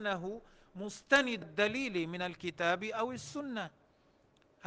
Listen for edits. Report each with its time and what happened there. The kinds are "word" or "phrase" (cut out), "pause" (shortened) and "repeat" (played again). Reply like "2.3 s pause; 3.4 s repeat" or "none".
1.4 s word